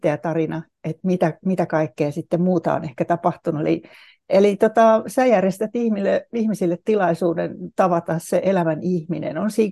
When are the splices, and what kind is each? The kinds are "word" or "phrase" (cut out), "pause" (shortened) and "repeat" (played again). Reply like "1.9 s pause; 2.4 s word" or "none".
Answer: none